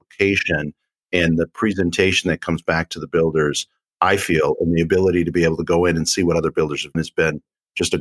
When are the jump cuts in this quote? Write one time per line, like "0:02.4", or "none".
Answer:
0:06.9